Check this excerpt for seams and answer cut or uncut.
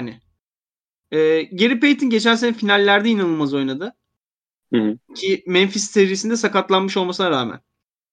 uncut